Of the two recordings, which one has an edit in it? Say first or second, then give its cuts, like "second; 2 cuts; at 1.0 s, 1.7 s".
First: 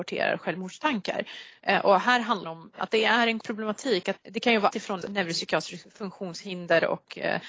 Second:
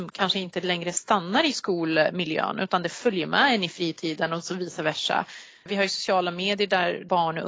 first; 5 cuts; at 2.4 s, 3.4 s, 4.2 s, 4.7 s, 5.0 s